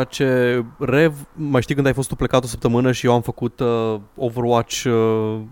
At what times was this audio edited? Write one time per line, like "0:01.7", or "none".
none